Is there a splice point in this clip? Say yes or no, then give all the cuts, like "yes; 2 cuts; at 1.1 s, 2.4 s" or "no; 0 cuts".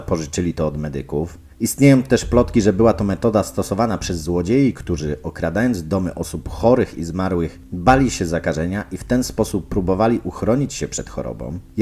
no; 0 cuts